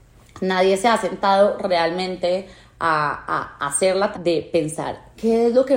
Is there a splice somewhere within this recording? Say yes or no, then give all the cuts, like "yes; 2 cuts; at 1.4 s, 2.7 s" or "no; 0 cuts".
yes; 1 cut; at 4.1 s